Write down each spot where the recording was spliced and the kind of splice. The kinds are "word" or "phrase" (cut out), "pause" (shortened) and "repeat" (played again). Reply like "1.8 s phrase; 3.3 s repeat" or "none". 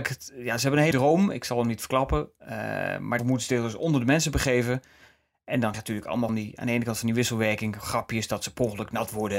0.9 s word; 3.2 s word; 5.7 s word; 6.3 s word